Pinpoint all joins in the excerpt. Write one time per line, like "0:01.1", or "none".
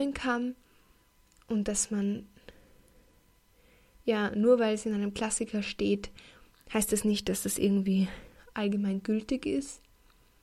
none